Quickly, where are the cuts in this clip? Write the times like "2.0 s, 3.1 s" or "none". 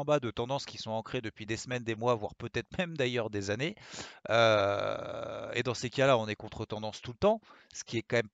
none